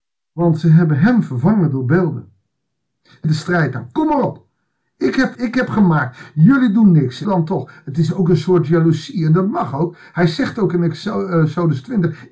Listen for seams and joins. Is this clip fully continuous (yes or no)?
no